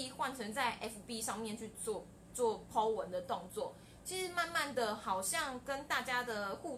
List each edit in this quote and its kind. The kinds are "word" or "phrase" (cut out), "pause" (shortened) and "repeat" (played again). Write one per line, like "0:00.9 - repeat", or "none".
none